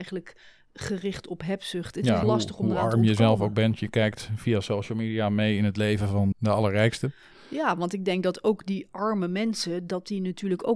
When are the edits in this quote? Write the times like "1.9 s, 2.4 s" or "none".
2.2 s, 6.3 s